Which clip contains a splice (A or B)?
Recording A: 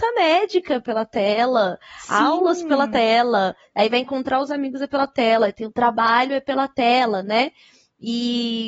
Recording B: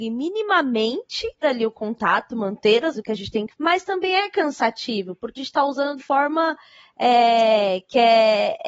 B